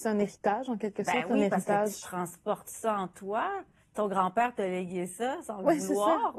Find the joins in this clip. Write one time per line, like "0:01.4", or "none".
none